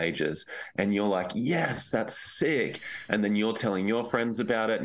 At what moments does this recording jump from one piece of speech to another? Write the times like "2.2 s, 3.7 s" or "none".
none